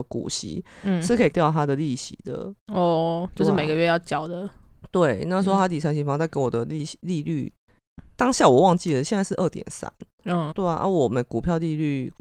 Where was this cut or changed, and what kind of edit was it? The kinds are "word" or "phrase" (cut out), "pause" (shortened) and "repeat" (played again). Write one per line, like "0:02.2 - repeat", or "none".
0:01.3 - word
0:10.5 - word

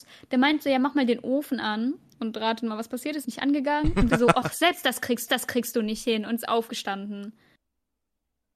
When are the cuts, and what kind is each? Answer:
0:03.2 - phrase
0:04.1 - word
0:05.3 - repeat

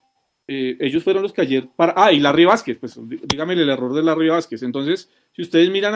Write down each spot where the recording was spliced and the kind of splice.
none

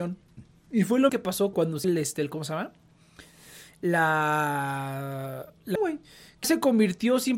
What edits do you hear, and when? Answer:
0:01.1 - word
0:01.5 - word
0:01.8 - word
0:05.8 - word
0:06.4 - word

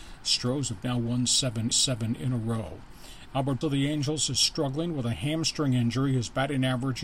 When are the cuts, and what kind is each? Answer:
0:01.7 - repeat
0:03.6 - word

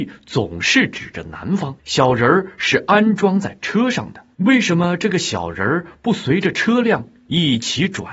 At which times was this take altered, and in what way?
0:01.8 - pause
0:04.3 - pause

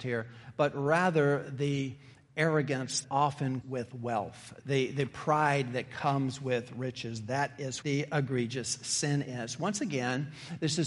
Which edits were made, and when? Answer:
0:03.0 - word
0:03.6 - word
0:04.6 - word
0:07.8 - word

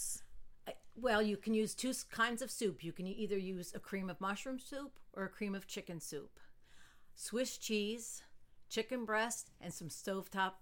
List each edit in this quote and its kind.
none

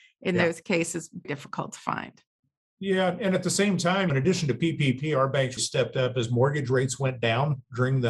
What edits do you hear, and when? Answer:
0:01.2 - word
0:04.1 - phrase
0:05.6 - word

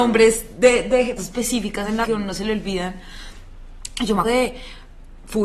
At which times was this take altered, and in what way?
0:01.2 - word
0:02.0 - word
0:04.2 - word

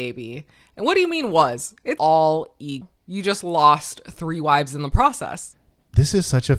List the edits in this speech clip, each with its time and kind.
0:02.0 - word

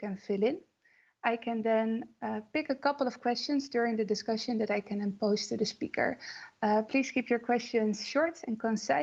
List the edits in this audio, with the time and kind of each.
none

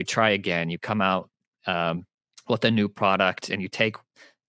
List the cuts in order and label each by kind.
0:02.3 - pause

